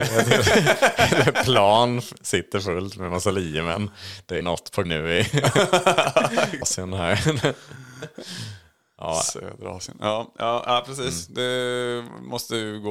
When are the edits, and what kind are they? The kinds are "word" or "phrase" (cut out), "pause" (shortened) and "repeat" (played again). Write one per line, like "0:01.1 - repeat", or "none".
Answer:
0:04.4 - word
0:04.8 - word
0:06.6 - word